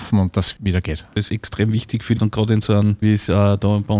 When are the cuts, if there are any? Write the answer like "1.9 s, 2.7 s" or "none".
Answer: 1.3 s, 2.2 s, 3.0 s